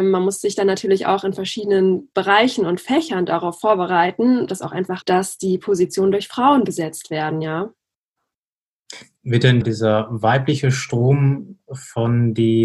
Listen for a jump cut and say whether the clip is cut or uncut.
cut